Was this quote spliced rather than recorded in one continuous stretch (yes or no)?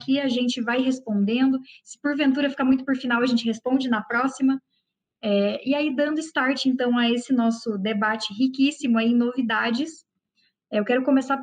no